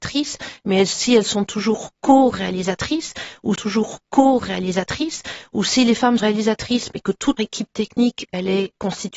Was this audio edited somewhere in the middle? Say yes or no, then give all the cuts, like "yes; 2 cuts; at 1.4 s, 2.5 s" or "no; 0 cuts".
yes; 3 cuts; at 3.5 s, 6.2 s, 7.4 s